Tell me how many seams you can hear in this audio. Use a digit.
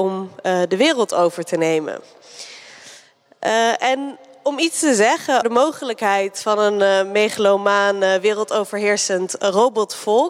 1